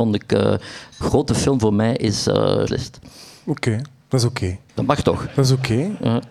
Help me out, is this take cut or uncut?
cut